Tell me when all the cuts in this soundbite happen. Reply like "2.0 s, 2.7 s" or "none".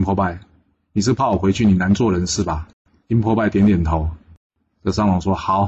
2.7 s